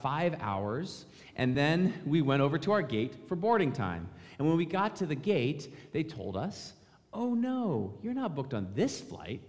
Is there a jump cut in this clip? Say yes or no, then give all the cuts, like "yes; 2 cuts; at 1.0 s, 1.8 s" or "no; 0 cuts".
no; 0 cuts